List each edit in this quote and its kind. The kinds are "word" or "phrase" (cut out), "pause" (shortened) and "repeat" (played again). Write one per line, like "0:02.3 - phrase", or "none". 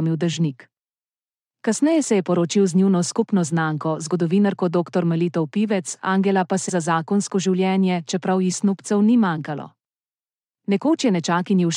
0:06.7 - phrase